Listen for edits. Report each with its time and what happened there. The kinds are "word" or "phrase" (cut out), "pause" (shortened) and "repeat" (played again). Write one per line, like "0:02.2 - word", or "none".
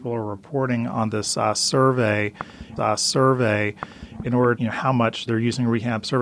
0:02.8 - repeat
0:04.6 - phrase
0:05.3 - word